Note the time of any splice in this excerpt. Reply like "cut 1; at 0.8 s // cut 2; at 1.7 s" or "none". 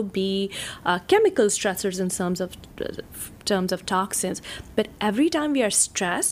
none